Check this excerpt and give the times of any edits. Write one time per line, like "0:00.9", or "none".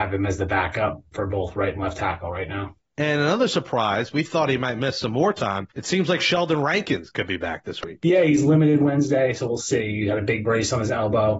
none